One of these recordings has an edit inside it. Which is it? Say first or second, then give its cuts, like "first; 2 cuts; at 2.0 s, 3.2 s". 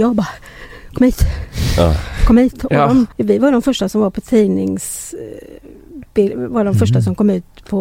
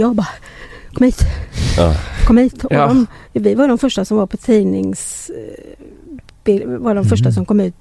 first; 2 cuts; at 3.1 s, 6.1 s